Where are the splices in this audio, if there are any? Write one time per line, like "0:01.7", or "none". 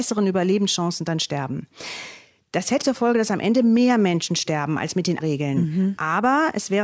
0:02.8
0:05.2